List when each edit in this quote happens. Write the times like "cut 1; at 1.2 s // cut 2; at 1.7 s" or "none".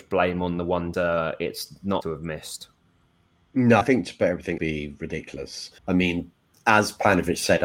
cut 1; at 0.9 s // cut 2; at 2.0 s // cut 3; at 3.8 s // cut 4; at 4.6 s // cut 5; at 5.8 s